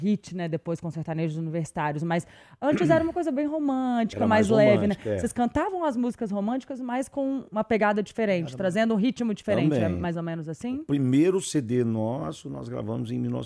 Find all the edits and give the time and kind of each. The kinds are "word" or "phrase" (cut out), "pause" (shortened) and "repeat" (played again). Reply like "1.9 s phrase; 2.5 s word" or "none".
7.5 s word